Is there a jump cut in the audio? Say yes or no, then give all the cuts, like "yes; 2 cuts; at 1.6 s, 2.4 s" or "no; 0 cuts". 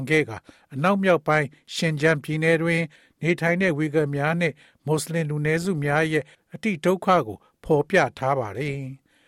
no; 0 cuts